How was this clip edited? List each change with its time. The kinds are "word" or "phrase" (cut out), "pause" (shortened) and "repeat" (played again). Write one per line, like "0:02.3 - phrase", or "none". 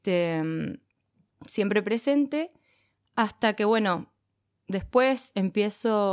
none